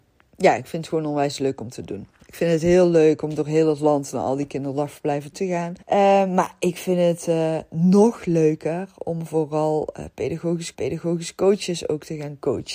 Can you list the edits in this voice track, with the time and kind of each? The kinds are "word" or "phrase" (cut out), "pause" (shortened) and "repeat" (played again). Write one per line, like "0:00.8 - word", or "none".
0:05.3 - word
0:05.8 - pause
0:10.7 - repeat